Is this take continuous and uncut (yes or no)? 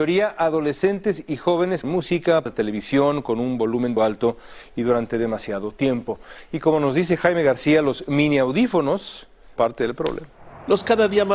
no